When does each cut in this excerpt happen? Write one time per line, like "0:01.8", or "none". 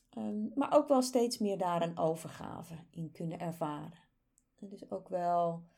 none